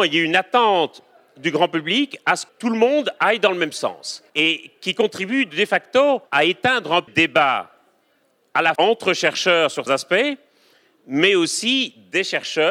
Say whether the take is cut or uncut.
cut